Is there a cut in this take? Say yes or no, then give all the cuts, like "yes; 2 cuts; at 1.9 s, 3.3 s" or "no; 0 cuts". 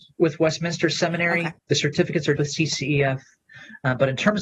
yes; 2 cuts; at 1.6 s, 2.4 s